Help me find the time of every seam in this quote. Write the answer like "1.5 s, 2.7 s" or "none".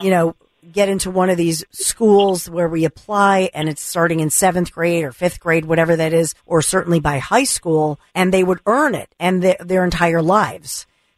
6.4 s, 8.1 s